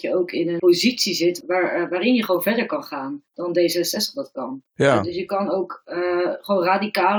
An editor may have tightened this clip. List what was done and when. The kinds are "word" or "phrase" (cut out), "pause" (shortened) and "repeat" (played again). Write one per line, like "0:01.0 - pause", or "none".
0:04.7 - pause